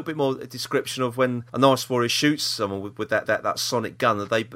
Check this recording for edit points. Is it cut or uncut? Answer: cut